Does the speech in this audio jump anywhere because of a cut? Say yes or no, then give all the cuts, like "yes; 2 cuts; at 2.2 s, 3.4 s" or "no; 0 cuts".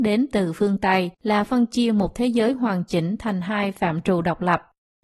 yes; 1 cut; at 1.1 s